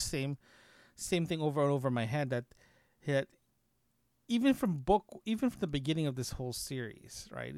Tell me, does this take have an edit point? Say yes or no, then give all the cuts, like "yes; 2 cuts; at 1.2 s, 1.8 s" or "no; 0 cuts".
no; 0 cuts